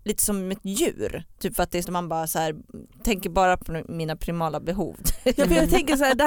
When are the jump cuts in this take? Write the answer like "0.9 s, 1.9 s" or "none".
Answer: 1.8 s